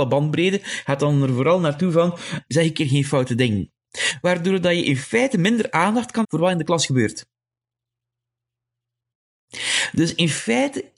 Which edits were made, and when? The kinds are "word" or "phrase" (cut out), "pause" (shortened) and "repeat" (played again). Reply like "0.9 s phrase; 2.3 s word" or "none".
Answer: 2.5 s word; 6.2 s word